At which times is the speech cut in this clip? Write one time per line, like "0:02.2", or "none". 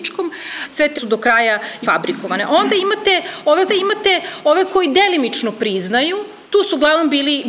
0:00.9
0:01.8
0:03.7
0:06.4